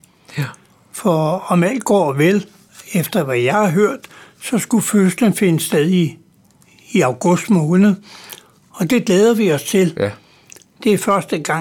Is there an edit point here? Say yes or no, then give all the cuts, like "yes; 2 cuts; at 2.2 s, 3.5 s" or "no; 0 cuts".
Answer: no; 0 cuts